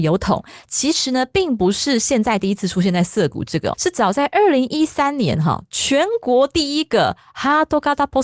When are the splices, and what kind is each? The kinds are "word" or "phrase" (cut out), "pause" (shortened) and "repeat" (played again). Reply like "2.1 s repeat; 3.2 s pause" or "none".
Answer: 3.7 s word

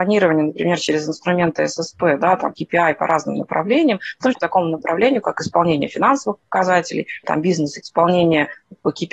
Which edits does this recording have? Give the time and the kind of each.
2.5 s word; 4.3 s word; 7.2 s word; 7.8 s phrase

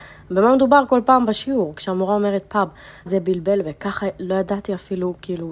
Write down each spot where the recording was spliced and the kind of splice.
3.1 s word

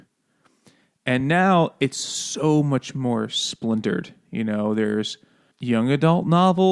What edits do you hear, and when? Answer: none

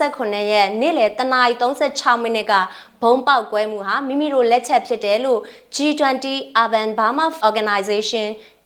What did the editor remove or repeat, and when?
7.4 s word

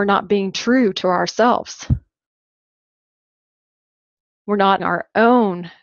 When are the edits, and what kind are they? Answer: 4.8 s word

